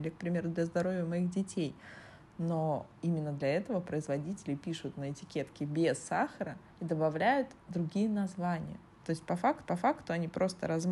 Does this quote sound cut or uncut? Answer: cut